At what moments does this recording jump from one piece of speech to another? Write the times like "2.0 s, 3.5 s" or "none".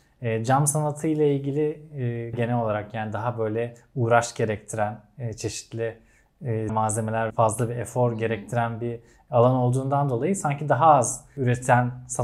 2.3 s, 6.7 s, 7.3 s

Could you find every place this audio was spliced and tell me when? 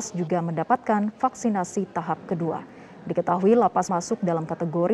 3.9 s

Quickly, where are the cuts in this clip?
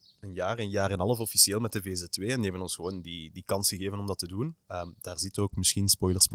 4.6 s

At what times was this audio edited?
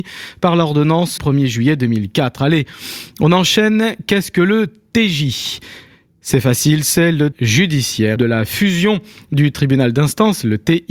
1.2 s, 7.3 s, 8.2 s

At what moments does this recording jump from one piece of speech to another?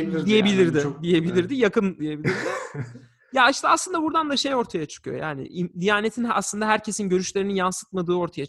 2.0 s

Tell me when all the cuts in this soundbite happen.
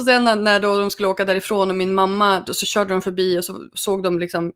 none

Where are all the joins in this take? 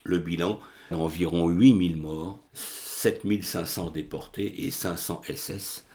0.9 s, 2.5 s

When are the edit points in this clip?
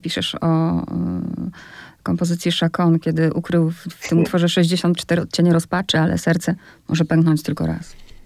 none

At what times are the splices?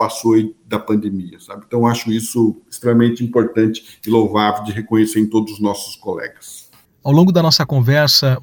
none

